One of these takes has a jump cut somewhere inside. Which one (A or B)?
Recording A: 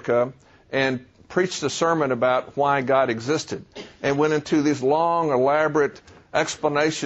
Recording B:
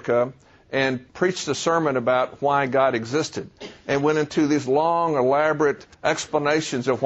B